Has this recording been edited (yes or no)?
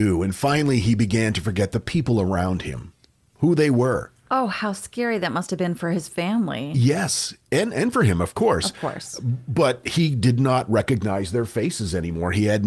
no